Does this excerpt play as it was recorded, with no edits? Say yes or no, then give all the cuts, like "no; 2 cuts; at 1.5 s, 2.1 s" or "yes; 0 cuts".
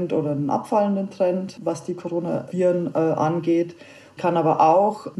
no; 1 cut; at 4.2 s